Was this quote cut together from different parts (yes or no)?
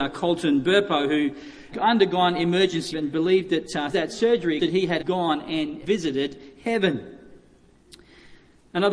yes